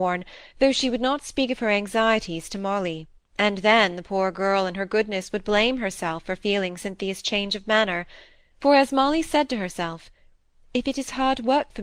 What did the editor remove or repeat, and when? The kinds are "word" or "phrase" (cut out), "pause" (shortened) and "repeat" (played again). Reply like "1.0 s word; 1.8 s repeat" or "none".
3.2 s pause